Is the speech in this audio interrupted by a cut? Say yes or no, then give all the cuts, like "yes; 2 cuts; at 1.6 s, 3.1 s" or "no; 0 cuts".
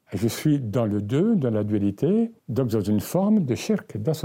yes; 1 cut; at 2.4 s